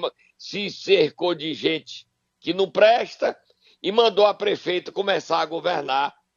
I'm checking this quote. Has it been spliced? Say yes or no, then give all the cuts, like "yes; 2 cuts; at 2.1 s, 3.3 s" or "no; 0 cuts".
no; 0 cuts